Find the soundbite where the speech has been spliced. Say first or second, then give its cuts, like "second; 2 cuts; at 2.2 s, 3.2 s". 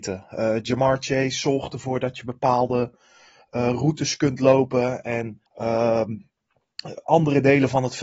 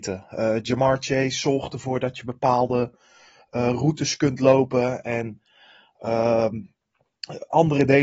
first; 1 cut; at 5.5 s